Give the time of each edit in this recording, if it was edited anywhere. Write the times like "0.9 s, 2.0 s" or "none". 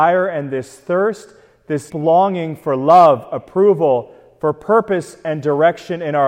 1.9 s